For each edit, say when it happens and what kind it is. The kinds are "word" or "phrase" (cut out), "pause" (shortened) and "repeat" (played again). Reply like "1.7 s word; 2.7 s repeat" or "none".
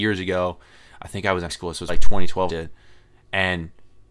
1.5 s word; 1.9 s word; 2.5 s phrase